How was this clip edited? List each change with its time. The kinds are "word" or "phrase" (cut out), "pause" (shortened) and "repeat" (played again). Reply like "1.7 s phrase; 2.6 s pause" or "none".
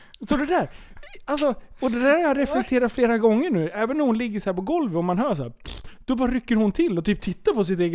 none